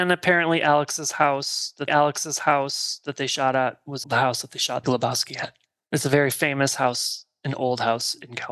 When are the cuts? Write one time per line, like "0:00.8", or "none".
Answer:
0:01.9
0:04.0
0:04.8